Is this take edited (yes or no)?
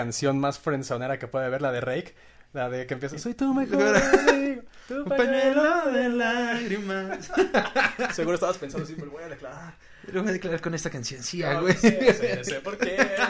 no